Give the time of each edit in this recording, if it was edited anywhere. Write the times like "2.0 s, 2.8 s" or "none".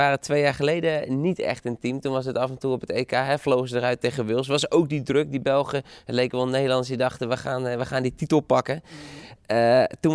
none